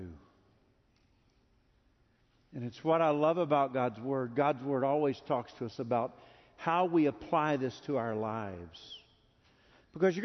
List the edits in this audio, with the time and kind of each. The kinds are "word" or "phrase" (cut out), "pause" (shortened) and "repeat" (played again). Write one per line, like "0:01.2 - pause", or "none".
none